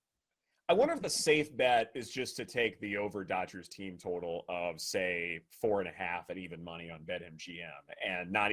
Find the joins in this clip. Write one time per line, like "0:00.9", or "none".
none